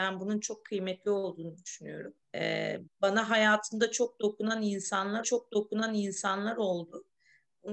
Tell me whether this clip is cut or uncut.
cut